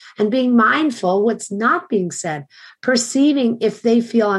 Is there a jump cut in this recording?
no; 0 cuts

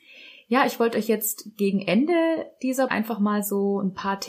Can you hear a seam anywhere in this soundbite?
yes; 1 cut; at 2.9 s

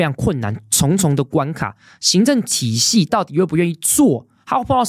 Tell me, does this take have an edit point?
no; 0 cuts

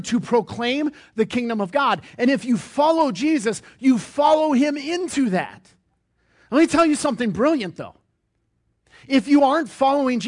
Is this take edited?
no; 0 cuts

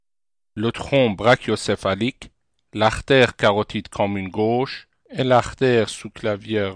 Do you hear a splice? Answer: no; 0 cuts

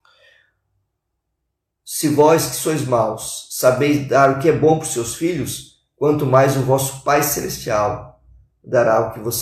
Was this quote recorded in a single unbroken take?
yes; 0 cuts

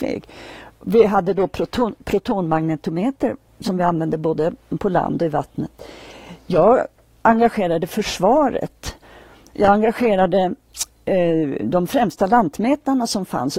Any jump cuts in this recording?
no; 0 cuts

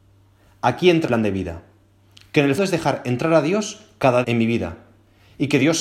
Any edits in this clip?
yes; 3 cuts; at 1.1 s, 2.6 s, 4.2 s

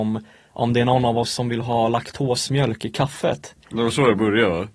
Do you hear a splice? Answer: no; 0 cuts

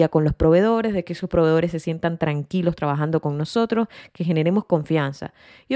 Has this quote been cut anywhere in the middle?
no; 0 cuts

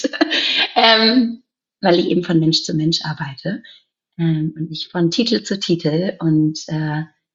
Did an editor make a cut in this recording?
no; 0 cuts

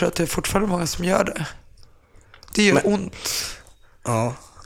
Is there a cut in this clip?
no; 0 cuts

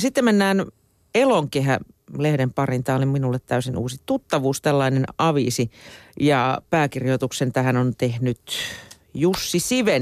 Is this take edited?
no; 0 cuts

